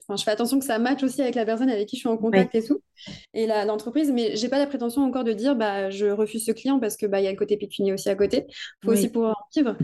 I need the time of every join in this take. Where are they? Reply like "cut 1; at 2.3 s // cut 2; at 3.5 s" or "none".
none